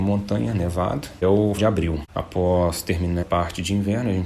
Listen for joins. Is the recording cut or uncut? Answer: cut